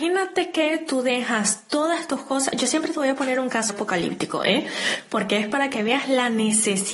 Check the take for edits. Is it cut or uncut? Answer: cut